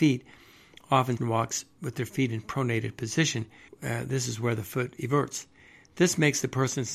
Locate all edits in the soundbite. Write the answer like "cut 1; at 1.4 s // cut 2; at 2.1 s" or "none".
cut 1; at 1.2 s // cut 2; at 3.7 s